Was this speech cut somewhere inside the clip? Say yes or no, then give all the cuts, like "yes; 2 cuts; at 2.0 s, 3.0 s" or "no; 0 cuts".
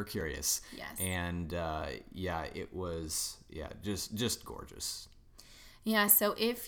no; 0 cuts